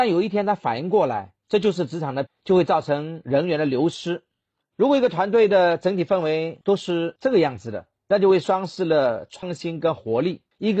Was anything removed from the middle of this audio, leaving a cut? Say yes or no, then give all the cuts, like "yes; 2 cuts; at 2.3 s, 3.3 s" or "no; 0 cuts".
yes; 1 cut; at 2.3 s